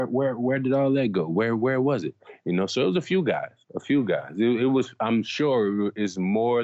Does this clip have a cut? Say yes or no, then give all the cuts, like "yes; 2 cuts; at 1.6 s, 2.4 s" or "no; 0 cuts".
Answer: yes; 1 cut; at 3.6 s